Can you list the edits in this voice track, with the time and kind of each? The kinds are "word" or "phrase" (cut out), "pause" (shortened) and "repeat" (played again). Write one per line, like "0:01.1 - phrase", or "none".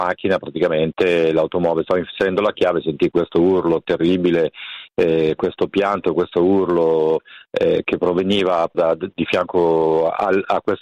0:08.7 - word

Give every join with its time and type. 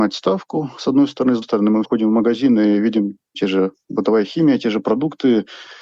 0:01.4 - word
0:01.8 - word
0:03.3 - word

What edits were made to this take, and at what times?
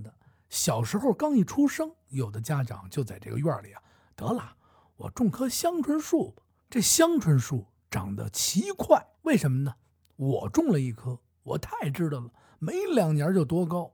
0:06.6 - pause
0:09.1 - pause

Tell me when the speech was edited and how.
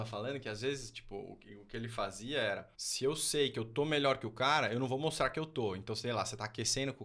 0:02.7 - pause

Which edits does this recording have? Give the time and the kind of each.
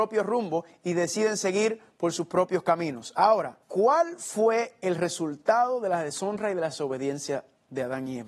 0:03.6 - pause

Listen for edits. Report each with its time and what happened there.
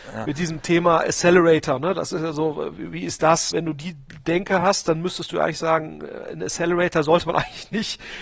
none

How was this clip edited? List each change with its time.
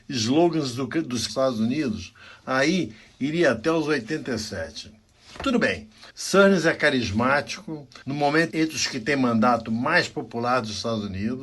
0:01.3 - phrase
0:06.1 - pause
0:08.0 - pause
0:08.5 - phrase

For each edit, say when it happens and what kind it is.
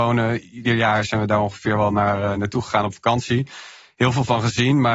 none

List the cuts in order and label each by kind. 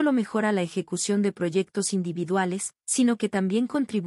0:02.8 - pause

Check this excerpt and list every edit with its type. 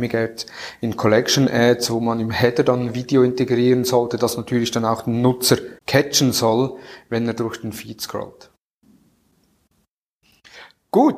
0:05.8 - pause

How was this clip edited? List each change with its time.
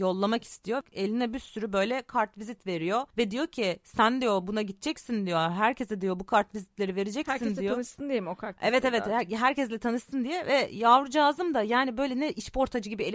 none

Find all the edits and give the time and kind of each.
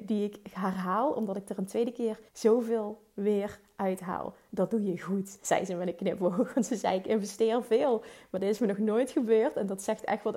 0:02.3 - pause

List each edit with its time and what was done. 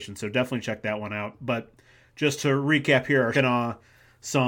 0:03.3 - word

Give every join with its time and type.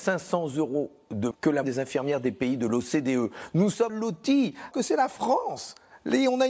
0:01.3 - word
0:01.6 - word
0:03.9 - word
0:04.7 - word

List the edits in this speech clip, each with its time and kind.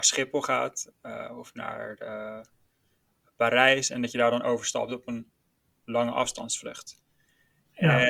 none

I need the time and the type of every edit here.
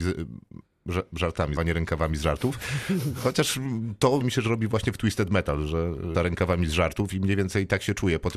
0:01.6 - word
0:04.2 - word
0:06.1 - word

